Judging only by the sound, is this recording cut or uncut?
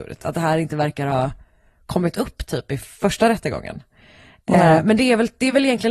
uncut